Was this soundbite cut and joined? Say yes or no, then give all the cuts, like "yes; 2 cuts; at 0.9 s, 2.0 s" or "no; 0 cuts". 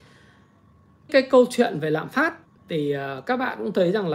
yes; 2 cuts; at 1.1 s, 2.4 s